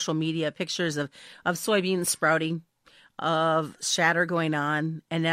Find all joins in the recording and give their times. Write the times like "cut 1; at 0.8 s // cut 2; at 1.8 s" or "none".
none